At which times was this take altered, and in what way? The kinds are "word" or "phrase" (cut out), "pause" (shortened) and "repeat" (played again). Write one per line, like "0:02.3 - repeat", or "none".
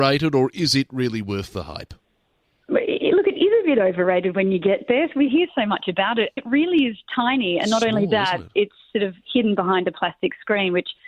0:05.3 - word
0:06.4 - word